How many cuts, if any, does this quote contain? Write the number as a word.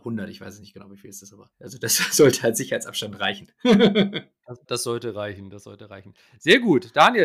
one